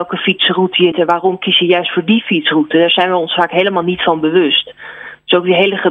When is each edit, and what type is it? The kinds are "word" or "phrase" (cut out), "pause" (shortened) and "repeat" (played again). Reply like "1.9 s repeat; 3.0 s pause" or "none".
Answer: 0.9 s word

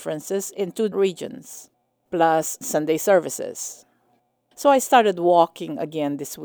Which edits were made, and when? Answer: 0.9 s word; 2.6 s phrase

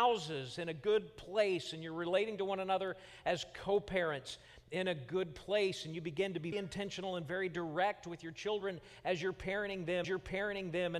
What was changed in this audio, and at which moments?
6.5 s word; 10.0 s repeat

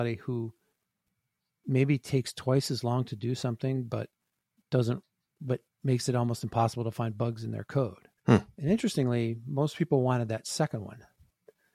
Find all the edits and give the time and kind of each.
8.2 s pause

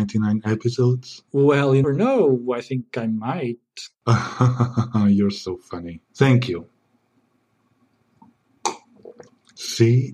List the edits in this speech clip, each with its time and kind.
1.8 s word; 6.1 s pause

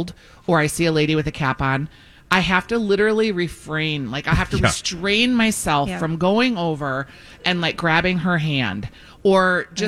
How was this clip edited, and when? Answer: none

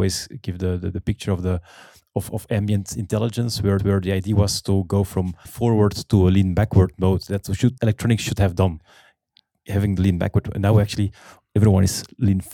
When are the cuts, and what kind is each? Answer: 3.8 s repeat; 5.5 s phrase; 7.8 s phrase

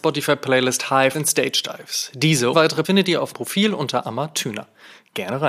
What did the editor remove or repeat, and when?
1.1 s word; 2.5 s word; 2.8 s word; 3.3 s word; 4.0 s word

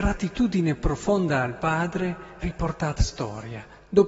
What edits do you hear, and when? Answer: 2.4 s word; 3.0 s word

